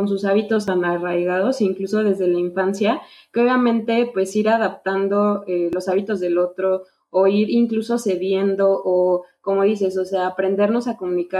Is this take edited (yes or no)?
no